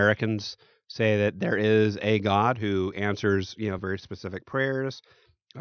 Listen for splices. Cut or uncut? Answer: uncut